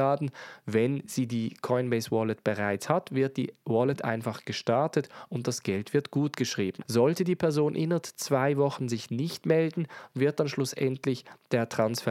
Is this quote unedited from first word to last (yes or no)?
yes